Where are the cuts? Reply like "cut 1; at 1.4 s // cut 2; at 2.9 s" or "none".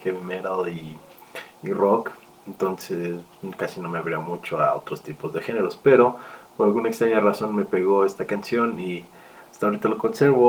none